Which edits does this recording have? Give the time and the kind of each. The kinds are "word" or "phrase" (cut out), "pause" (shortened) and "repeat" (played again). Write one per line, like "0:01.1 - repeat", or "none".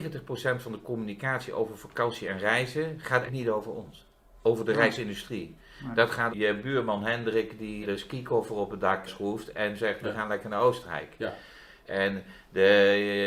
0:03.3 - word
0:06.3 - word
0:07.8 - word
0:09.1 - word